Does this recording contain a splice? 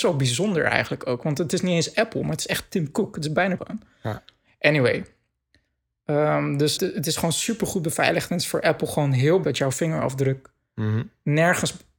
yes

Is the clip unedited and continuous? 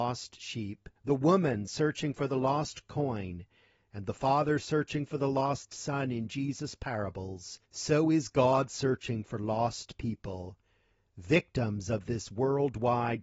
no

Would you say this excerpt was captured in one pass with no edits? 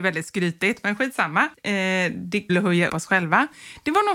no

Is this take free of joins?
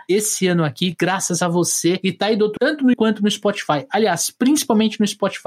no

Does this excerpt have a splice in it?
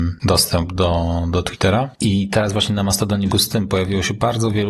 yes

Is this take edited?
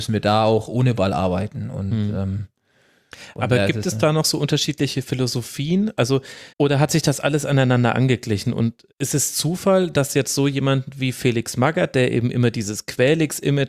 yes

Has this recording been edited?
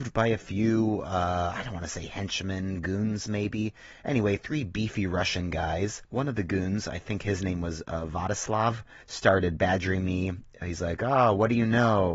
yes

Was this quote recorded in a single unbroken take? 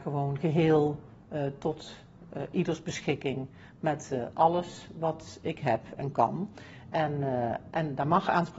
yes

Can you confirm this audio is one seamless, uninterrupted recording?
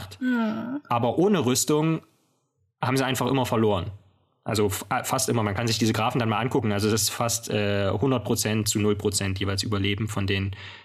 yes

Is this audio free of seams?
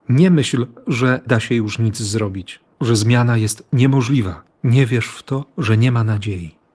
no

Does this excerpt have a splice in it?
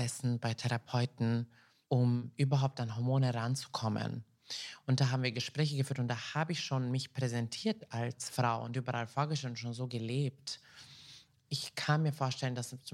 no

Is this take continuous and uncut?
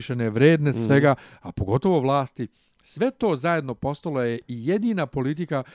yes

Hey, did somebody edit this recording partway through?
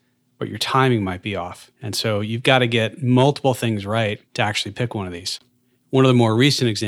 yes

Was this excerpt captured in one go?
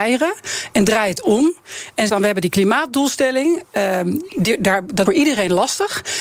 no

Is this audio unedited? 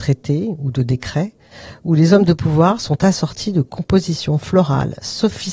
yes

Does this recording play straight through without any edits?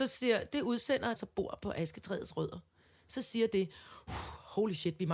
no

